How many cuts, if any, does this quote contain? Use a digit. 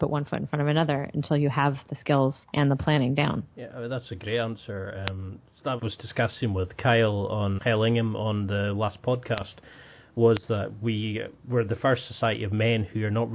4